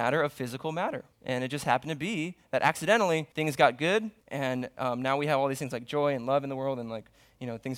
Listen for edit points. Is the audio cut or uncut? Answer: cut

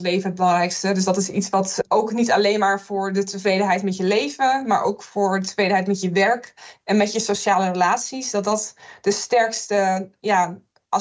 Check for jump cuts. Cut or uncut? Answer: uncut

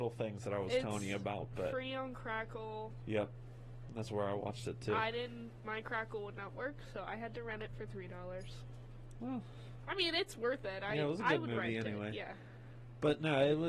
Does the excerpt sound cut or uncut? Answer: uncut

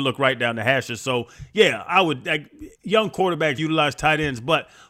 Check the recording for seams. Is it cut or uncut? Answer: cut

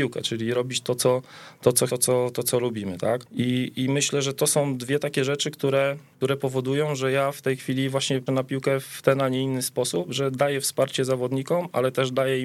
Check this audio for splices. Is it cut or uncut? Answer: cut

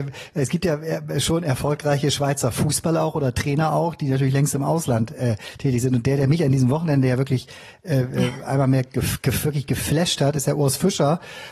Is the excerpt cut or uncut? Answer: uncut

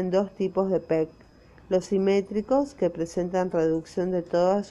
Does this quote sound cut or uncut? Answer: uncut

